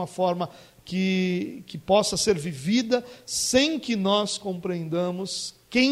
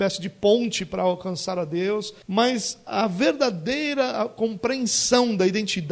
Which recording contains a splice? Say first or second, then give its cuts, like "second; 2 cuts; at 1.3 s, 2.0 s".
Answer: second; 1 cut; at 2.2 s